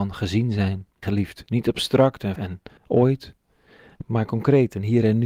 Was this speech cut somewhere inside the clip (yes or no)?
yes